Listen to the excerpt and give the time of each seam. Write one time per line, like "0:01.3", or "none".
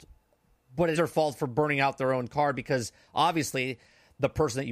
0:00.9

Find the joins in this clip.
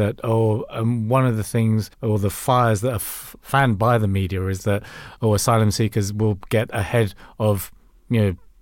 0:01.9

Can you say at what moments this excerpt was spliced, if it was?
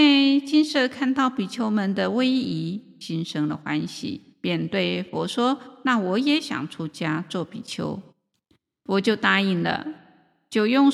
0:04.3
0:08.1

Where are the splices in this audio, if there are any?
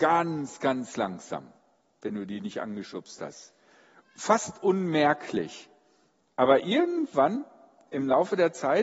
none

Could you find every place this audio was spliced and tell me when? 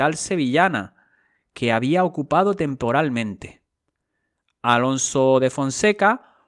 none

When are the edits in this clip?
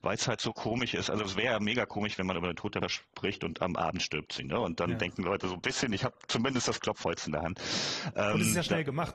0:02.8
0:07.0

